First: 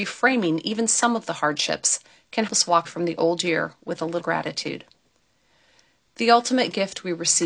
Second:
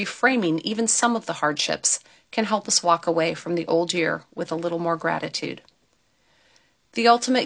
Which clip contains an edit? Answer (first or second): first